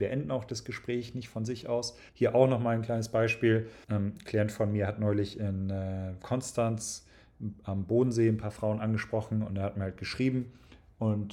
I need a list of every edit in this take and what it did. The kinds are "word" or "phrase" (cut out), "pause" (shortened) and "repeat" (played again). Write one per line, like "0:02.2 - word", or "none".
0:02.1 - pause
0:03.8 - pause